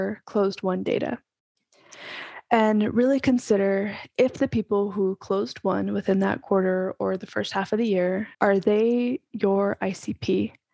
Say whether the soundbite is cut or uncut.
cut